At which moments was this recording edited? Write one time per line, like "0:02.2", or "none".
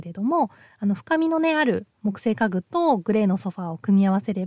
0:01.9